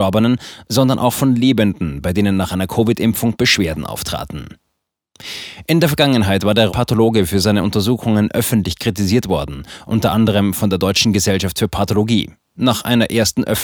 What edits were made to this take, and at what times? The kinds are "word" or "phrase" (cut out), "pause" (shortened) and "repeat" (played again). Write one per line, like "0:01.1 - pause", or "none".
0:06.7 - word